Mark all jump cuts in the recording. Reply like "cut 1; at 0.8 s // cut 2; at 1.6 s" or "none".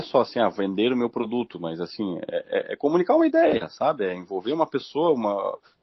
none